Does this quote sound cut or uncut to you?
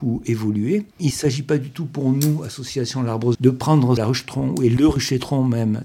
cut